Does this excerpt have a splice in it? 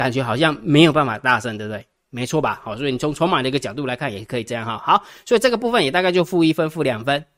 no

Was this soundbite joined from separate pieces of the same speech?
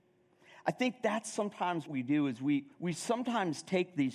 yes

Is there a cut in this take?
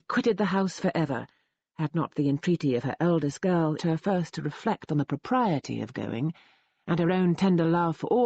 yes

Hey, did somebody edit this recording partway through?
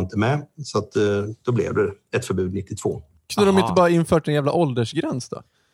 no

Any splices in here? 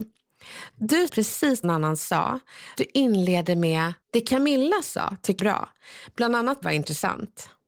yes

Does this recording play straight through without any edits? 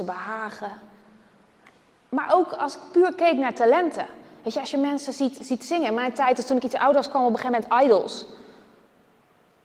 yes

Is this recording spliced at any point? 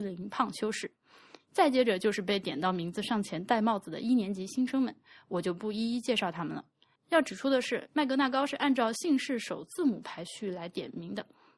no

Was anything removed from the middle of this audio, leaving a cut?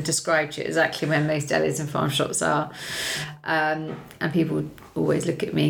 no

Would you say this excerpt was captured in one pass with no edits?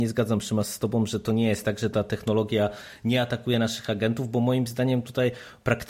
yes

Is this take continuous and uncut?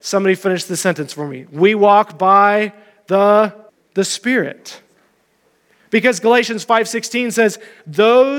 no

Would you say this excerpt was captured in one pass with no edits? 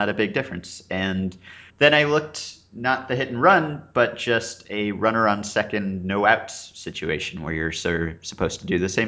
no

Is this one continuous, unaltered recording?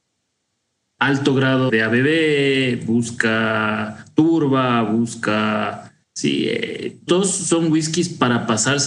no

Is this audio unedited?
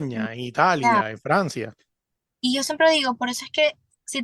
yes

